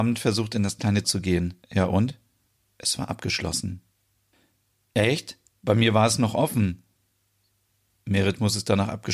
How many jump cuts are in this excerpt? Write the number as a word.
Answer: four